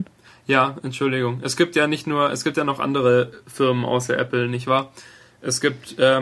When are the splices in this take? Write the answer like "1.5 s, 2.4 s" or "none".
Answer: none